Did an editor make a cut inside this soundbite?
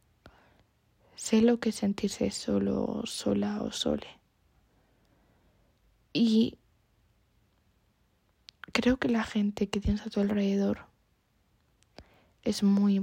no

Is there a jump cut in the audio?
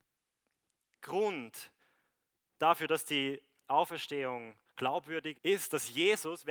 yes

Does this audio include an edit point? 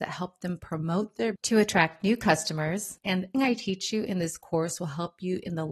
yes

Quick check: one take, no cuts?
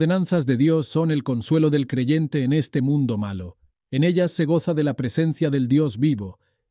yes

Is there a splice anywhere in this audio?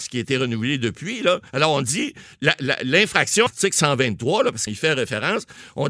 yes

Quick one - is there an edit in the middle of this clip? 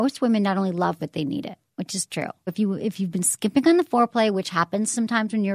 yes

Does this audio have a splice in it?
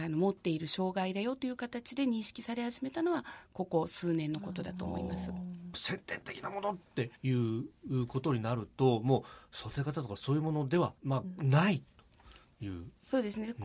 yes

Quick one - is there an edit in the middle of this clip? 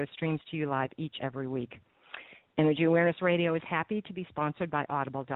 yes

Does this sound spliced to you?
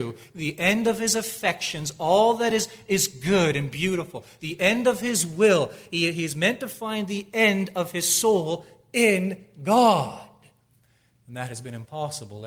no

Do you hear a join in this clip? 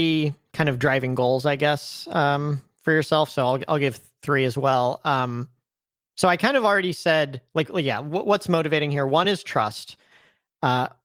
no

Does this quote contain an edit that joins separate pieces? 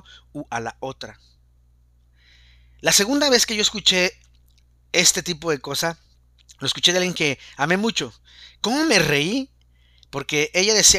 no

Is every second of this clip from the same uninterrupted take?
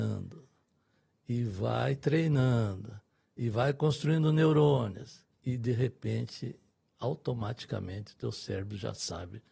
no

